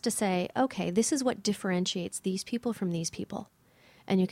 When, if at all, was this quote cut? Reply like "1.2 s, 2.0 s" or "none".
none